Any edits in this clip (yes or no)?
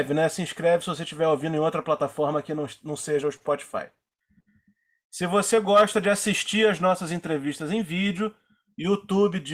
no